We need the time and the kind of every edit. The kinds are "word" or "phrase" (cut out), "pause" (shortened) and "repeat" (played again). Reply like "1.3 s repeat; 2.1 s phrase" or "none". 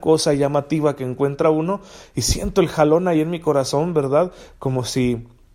none

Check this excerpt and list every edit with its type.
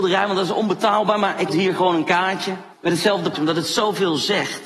1.5 s phrase; 2.7 s pause; 3.3 s word

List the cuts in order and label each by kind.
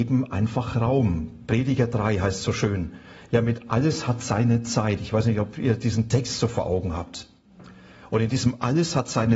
none

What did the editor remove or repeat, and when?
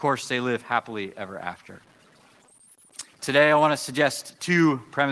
3.1 s pause

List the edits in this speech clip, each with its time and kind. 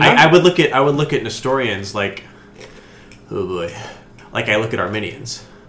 none

